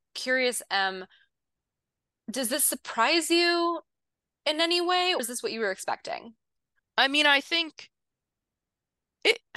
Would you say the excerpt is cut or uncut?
cut